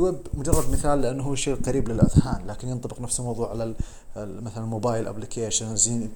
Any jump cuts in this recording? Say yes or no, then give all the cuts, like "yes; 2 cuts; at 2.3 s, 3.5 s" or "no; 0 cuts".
no; 0 cuts